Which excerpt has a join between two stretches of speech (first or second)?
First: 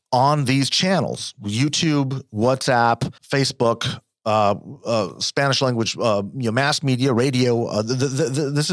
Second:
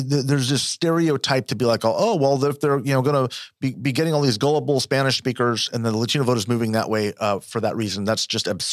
first